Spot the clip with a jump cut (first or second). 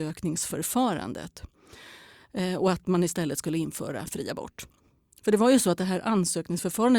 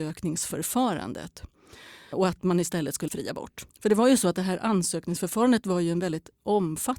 second